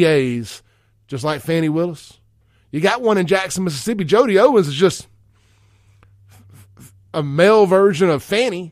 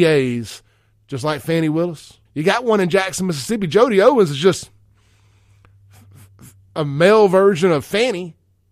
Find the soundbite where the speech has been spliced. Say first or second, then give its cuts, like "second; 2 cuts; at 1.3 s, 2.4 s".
second; 1 cut; at 2.3 s